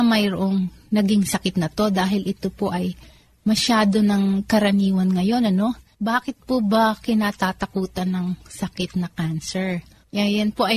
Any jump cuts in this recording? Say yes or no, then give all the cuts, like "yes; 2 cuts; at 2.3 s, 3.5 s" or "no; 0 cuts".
no; 0 cuts